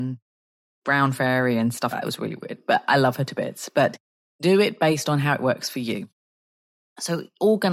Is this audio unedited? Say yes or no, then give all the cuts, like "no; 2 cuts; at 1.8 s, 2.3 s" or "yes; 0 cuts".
no; 1 cut; at 1.9 s